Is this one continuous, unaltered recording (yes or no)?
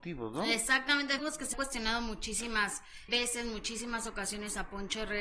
no